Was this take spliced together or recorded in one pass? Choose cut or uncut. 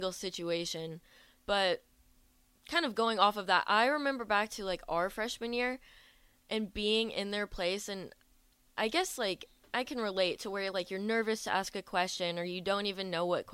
uncut